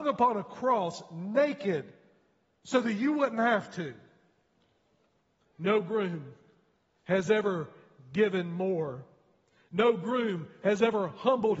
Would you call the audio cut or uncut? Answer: uncut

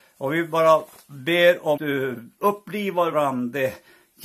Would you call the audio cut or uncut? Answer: cut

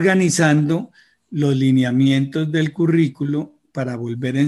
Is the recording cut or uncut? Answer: uncut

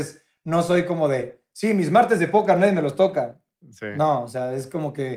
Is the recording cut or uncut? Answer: uncut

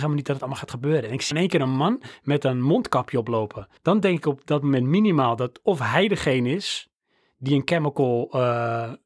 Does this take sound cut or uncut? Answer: cut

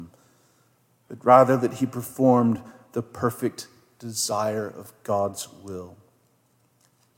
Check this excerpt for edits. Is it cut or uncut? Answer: uncut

